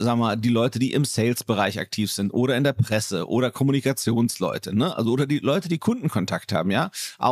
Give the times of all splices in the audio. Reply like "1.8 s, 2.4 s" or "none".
none